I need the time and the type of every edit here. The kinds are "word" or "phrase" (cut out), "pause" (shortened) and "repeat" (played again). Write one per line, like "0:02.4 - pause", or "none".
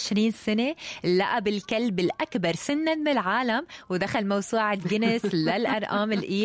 none